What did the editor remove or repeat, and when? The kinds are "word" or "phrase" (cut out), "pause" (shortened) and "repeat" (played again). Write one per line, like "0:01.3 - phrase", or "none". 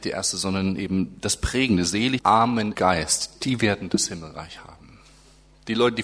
0:02.2 - phrase
0:02.7 - word